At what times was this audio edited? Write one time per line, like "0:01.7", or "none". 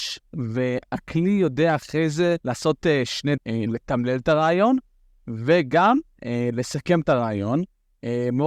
0:02.4
0:03.4